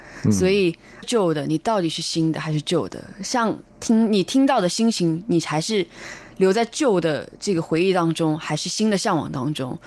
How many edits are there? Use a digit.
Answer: 1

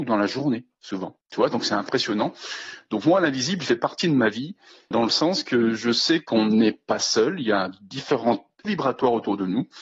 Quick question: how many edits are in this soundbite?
3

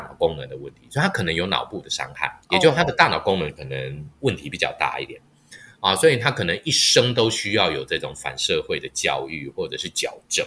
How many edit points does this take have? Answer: 1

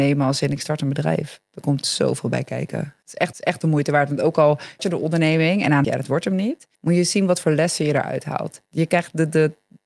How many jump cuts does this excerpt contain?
5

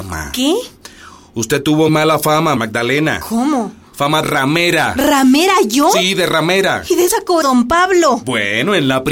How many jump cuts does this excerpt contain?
5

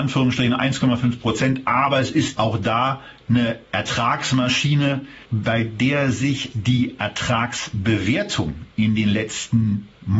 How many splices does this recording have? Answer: 3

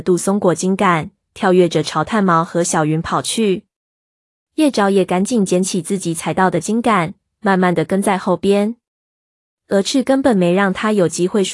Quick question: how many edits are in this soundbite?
0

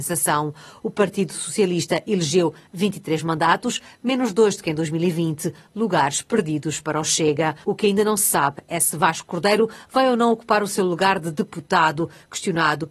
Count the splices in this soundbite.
1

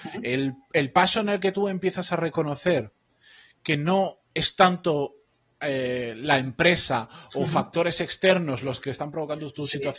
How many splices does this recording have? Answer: 0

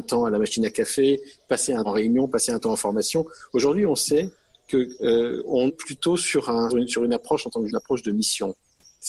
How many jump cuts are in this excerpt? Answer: 4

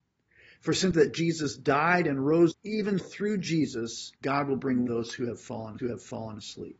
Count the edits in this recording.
6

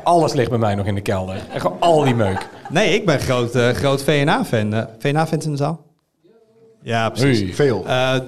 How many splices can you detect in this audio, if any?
0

